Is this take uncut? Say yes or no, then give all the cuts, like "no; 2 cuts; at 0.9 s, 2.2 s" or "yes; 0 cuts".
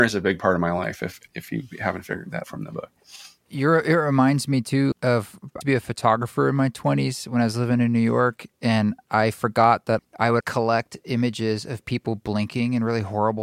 no; 6 cuts; at 1.3 s, 2.4 s, 4.9 s, 5.6 s, 10.0 s, 10.4 s